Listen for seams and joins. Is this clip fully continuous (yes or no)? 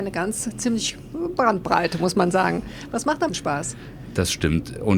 no